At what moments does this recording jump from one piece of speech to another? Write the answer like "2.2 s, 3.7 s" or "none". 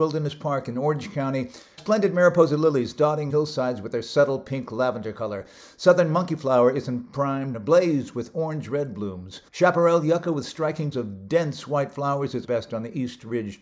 1.8 s, 3.3 s, 7.5 s, 9.5 s, 10.9 s, 12.4 s